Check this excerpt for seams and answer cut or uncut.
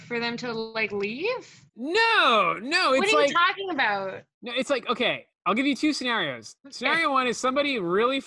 uncut